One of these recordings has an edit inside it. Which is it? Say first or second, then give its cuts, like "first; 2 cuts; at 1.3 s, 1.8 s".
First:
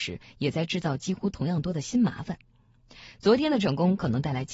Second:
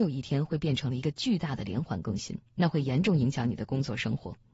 second; 1 cut; at 2.5 s